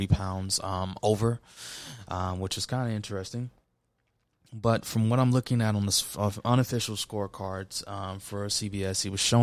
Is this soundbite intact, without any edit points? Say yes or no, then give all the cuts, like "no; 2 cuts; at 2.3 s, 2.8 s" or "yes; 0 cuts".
yes; 0 cuts